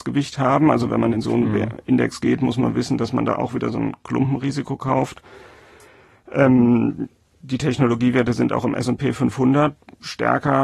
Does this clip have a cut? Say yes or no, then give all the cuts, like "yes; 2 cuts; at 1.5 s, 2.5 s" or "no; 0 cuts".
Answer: yes; 1 cut; at 7.1 s